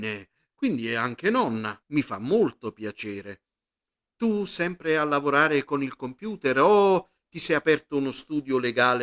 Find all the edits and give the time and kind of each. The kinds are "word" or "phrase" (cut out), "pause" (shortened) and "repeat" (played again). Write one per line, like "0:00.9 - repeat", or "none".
0:01.8 - pause